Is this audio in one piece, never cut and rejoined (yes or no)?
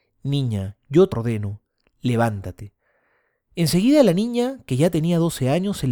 no